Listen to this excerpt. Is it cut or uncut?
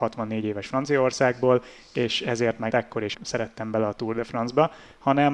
cut